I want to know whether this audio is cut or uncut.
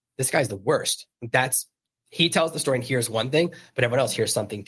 uncut